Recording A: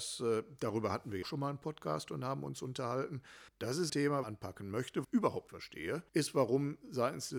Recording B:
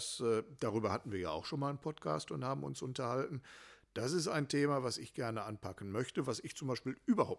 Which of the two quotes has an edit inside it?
A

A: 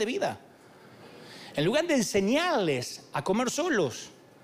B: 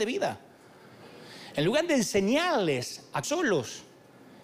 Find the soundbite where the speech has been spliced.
B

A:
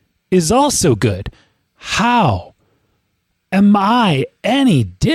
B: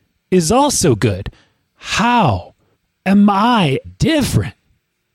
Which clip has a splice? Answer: B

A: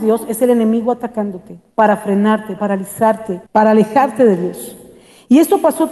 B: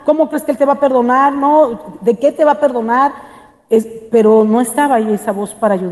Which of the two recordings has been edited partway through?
A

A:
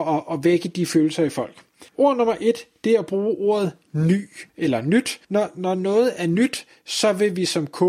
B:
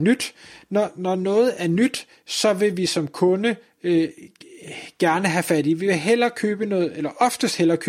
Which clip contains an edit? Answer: A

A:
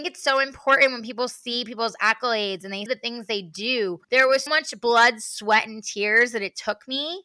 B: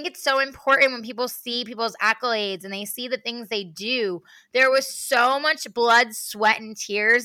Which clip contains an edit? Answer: A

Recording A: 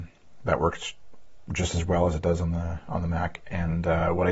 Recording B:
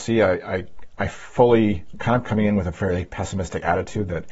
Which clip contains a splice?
B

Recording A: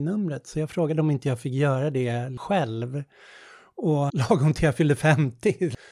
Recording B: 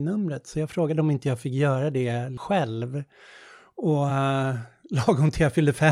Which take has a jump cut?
A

